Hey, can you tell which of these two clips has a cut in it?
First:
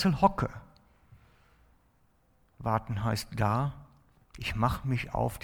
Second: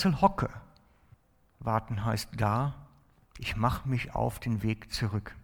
second; 1 cut; at 1.1 s

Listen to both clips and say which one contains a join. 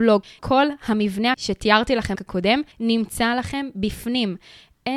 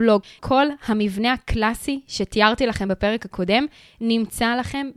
first; 3 cuts; at 1.3 s, 2.2 s, 2.7 s

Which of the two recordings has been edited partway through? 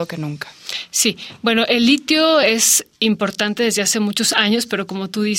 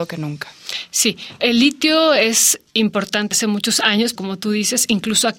second; 3 cuts; at 1.4 s, 3.3 s, 4.2 s

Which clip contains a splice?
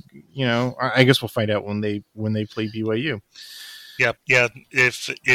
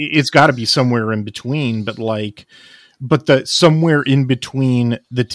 first; 1 cut; at 4.2 s

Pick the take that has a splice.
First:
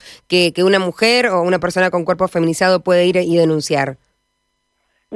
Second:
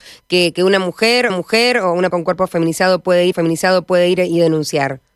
second; 3 cuts; at 1.3 s, 2.1 s, 3.3 s

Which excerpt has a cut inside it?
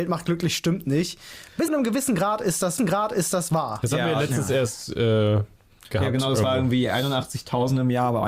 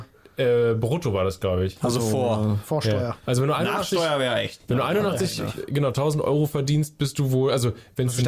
first; 2 cuts; at 1.7 s, 2.8 s

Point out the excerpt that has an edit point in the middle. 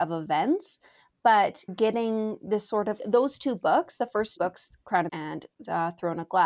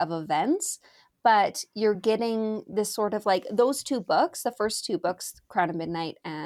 first; 4 cuts; at 1.7 s, 3.0 s, 4.4 s, 5.1 s

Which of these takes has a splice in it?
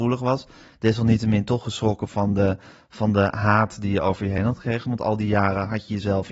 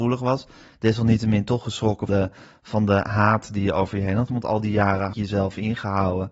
second; 3 cuts; at 2.1 s, 4.3 s, 5.1 s

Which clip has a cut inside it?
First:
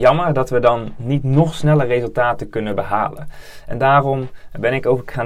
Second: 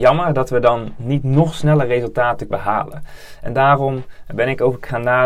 second; 1 cut; at 2.5 s

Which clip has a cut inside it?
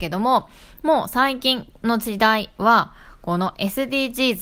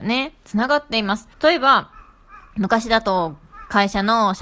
second; 1 cut; at 1.3 s

